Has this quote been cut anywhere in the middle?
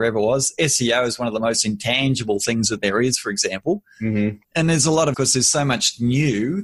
yes; 2 cuts; at 4.4 s, 5.1 s

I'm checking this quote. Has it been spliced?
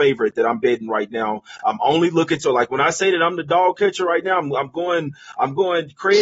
no; 0 cuts

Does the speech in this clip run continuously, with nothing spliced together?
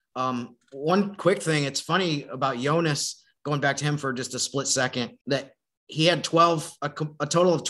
no; 1 cut; at 5.2 s

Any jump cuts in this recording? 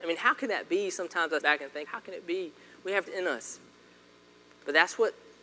yes; 3 cuts; at 1.4 s, 1.9 s, 3.1 s

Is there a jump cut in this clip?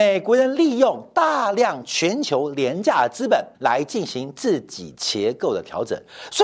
yes; 1 cut; at 3.5 s

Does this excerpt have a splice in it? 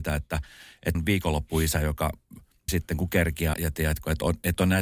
yes; 3 cuts; at 0.9 s, 2.7 s, 3.5 s

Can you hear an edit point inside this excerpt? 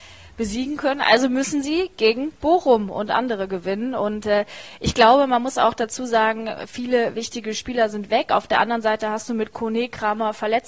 no; 0 cuts

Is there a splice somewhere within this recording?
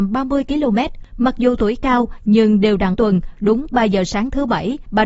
yes; 1 cut; at 2.9 s

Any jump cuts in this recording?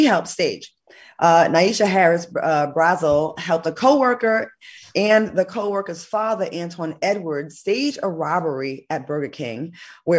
no; 0 cuts

